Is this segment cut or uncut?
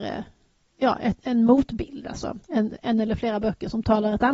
cut